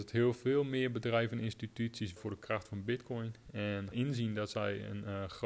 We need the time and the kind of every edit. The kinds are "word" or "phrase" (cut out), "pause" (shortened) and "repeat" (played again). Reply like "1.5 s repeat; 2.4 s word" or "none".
2.2 s phrase; 3.9 s word